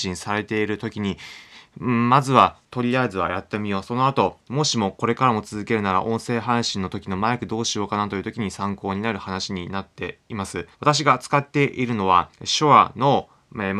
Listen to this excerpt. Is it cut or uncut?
cut